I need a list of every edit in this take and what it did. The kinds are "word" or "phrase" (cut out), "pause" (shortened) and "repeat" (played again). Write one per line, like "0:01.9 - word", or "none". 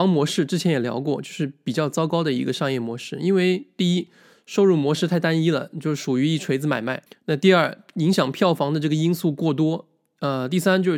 0:07.1 - pause